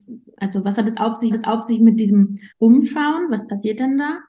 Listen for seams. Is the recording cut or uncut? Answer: cut